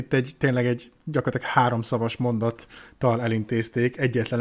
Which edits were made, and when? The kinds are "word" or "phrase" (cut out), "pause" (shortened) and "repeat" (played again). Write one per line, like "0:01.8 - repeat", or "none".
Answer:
none